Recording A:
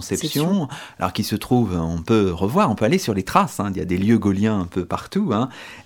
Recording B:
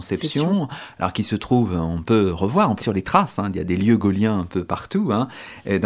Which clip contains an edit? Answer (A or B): B